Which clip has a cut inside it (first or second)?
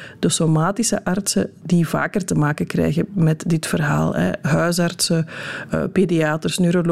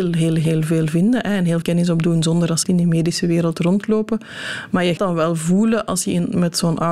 second